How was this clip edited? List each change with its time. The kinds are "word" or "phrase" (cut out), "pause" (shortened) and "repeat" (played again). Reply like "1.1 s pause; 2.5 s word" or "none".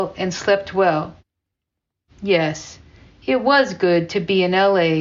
none